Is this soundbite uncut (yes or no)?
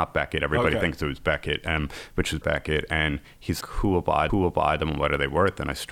no